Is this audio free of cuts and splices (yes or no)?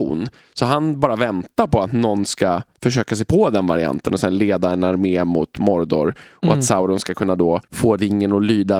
no